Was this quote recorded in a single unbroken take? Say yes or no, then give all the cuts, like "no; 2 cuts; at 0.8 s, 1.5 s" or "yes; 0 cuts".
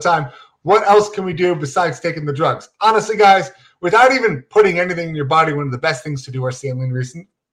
yes; 0 cuts